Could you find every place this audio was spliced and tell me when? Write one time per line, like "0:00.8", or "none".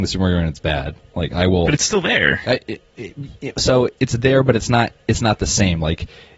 0:04.0